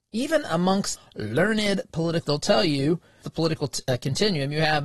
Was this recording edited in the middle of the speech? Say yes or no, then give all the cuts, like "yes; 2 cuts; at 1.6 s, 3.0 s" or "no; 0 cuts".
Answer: yes; 3 cuts; at 1.0 s, 2.2 s, 3.2 s